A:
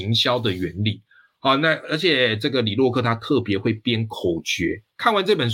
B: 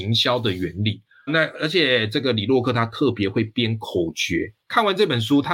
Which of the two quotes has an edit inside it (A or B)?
B